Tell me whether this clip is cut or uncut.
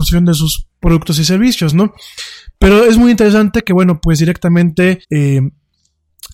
cut